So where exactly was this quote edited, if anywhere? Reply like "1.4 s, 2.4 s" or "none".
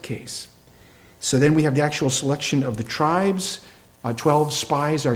none